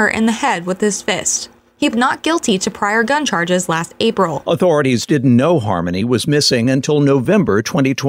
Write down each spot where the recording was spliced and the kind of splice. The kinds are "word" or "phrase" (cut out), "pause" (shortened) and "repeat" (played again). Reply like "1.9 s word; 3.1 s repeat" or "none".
1.9 s word